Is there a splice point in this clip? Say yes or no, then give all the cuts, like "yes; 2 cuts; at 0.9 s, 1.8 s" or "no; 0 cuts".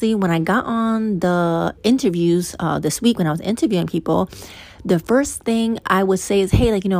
yes; 1 cut; at 1.8 s